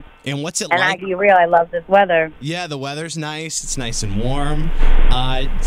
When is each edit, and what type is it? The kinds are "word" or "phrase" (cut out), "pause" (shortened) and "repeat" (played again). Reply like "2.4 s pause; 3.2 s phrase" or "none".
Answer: 1.0 s word; 2.4 s pause